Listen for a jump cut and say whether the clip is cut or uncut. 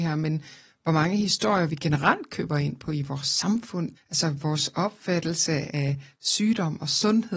cut